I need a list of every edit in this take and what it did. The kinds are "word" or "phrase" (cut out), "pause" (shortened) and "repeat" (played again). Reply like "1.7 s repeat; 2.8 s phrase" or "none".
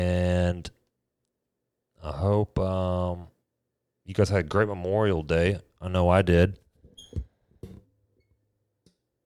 none